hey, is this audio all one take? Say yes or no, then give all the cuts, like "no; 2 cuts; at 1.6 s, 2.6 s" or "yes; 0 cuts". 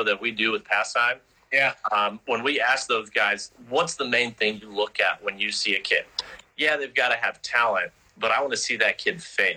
yes; 0 cuts